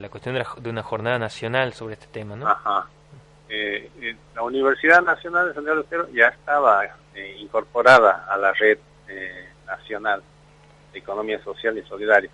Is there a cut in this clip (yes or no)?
no